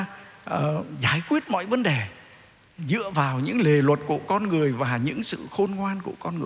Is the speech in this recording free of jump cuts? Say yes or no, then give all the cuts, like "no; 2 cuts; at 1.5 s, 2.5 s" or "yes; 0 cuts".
yes; 0 cuts